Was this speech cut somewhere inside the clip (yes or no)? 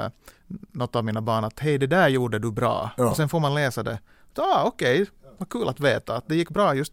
no